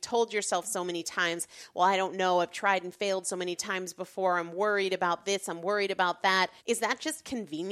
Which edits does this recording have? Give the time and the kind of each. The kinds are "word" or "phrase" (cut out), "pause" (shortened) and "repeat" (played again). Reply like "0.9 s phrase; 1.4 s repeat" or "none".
6.6 s pause